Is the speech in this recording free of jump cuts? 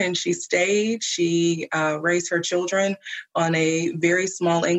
yes; 0 cuts

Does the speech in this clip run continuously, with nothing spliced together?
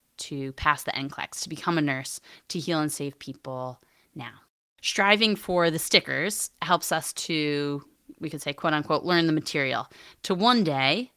yes; 0 cuts

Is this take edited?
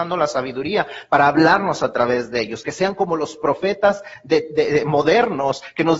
no; 0 cuts

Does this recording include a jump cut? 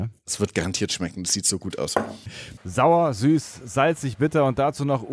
no; 0 cuts

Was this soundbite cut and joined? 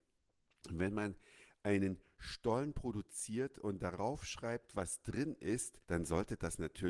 yes; 1 cut; at 5.8 s

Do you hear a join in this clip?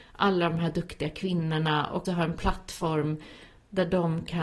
yes; 1 cut; at 2.0 s

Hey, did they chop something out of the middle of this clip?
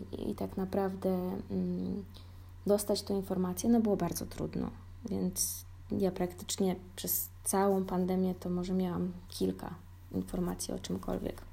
yes; 1 cut; at 9.3 s

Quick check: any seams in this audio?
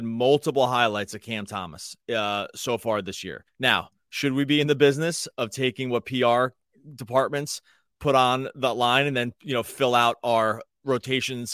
yes; 1 cut; at 3.5 s

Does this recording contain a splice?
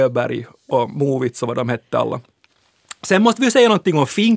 no; 0 cuts

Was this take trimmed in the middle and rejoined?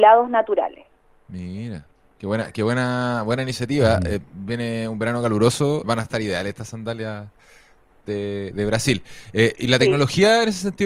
yes; 3 cuts; at 1.0 s, 5.8 s, 8.5 s

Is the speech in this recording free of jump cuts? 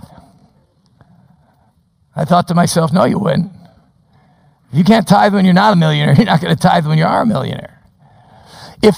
yes; 0 cuts

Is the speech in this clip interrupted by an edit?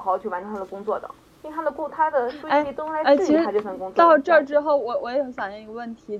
no; 0 cuts

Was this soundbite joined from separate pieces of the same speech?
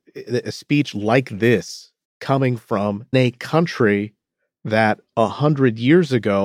yes; 2 cuts; at 2.0 s, 3.1 s

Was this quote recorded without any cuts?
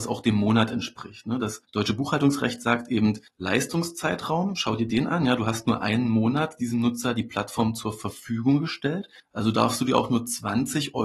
no; 3 cuts; at 1.6 s, 3.3 s, 9.2 s

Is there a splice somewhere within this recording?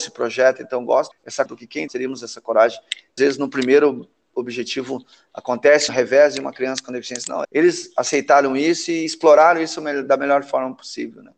yes; 6 cuts; at 1.1 s, 1.5 s, 1.9 s, 3.2 s, 5.9 s, 7.4 s

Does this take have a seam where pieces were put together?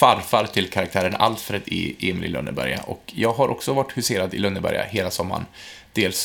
no; 0 cuts

